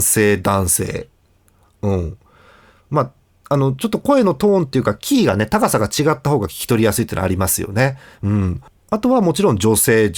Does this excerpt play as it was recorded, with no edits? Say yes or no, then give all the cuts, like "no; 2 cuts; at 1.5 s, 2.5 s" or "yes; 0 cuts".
yes; 0 cuts